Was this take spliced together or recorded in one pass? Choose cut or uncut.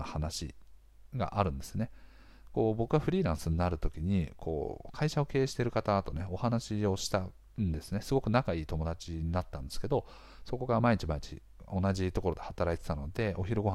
uncut